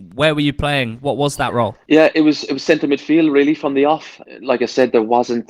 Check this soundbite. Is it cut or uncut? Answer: uncut